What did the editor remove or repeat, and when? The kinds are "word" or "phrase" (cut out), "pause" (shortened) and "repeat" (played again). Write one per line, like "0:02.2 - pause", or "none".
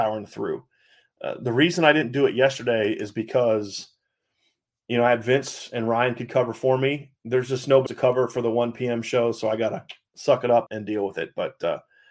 0:07.9 - word
0:10.7 - word